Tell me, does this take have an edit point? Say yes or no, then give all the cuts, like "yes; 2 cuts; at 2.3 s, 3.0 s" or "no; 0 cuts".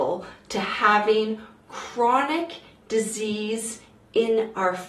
no; 0 cuts